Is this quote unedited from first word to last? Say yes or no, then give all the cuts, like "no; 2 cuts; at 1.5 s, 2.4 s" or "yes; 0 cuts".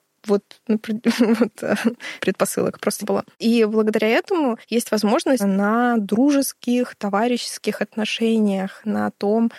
no; 5 cuts; at 2.2 s, 3.0 s, 3.3 s, 4.6 s, 5.4 s